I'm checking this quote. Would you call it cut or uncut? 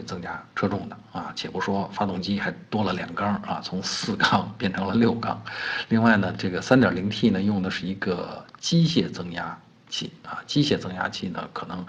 uncut